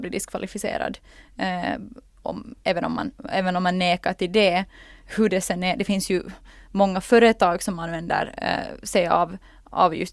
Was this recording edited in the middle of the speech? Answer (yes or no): no